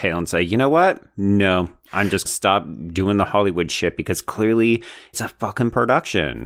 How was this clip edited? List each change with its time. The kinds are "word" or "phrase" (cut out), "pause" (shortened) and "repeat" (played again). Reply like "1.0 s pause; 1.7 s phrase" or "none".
2.3 s phrase; 5.1 s word

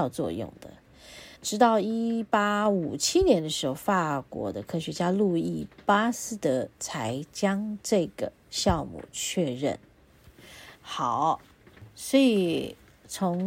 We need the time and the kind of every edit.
1.3 s pause; 8.4 s pause; 10.7 s pause

